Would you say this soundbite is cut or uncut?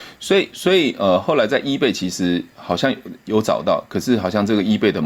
uncut